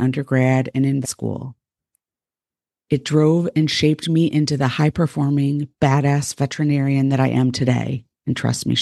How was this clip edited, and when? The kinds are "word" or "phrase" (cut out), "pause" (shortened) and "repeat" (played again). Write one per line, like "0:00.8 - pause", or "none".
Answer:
0:01.0 - word